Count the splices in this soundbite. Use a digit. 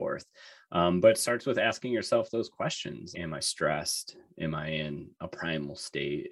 1